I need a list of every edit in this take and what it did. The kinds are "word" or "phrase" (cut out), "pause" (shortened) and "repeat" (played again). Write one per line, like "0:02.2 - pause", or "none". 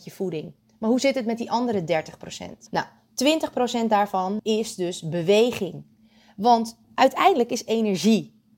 0:02.7 - pause
0:04.4 - word
0:06.8 - pause
0:07.7 - phrase